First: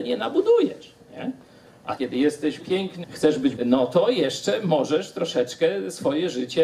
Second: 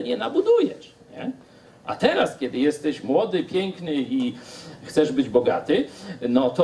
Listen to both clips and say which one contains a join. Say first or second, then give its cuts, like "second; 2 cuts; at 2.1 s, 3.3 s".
first; 4 cuts; at 2.0 s, 2.6 s, 3.0 s, 3.6 s